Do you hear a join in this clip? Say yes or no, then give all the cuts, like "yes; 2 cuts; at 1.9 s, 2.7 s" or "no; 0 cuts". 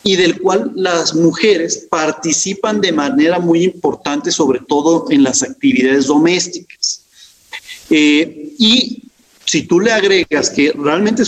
no; 0 cuts